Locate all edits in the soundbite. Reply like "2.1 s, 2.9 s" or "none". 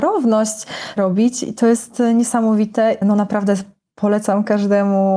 1.0 s, 3.0 s